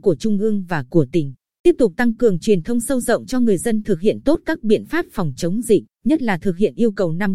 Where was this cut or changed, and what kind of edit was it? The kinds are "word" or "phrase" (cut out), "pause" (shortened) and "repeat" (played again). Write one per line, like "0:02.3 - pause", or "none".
0:01.4 - pause
0:05.9 - pause